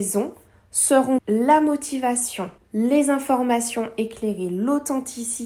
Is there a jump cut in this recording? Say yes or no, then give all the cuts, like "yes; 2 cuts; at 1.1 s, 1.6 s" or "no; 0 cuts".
yes; 2 cuts; at 1.2 s, 2.6 s